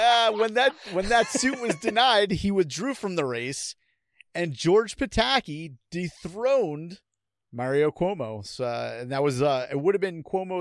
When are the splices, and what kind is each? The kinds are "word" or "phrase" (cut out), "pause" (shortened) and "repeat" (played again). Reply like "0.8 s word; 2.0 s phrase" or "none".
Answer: none